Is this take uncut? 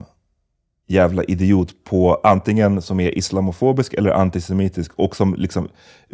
yes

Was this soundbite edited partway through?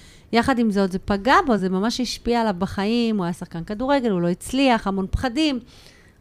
no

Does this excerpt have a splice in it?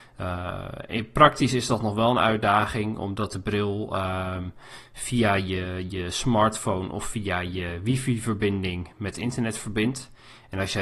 no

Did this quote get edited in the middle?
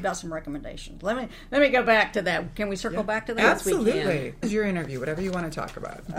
yes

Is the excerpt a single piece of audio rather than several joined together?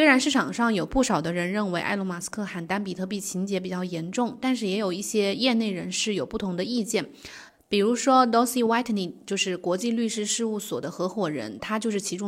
yes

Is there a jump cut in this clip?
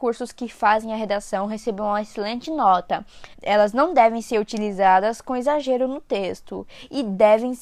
yes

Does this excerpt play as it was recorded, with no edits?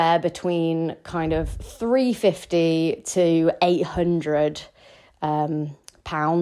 yes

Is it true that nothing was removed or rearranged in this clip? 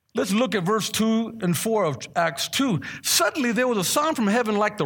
yes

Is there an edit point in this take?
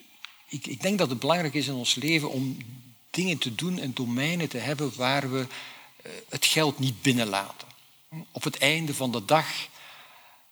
no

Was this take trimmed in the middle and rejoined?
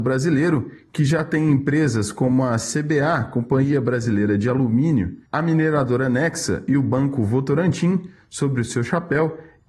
no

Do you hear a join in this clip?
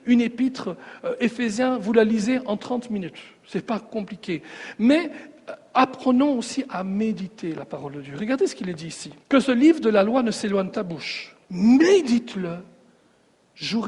yes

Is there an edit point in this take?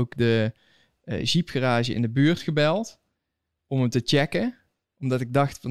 no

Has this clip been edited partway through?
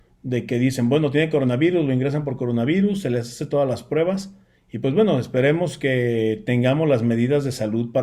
no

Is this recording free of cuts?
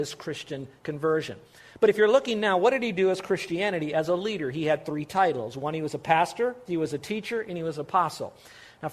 yes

